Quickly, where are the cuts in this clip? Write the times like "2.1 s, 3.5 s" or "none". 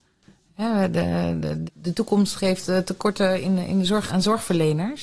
1.7 s, 4.1 s